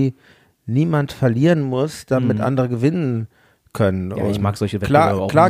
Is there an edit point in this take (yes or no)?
no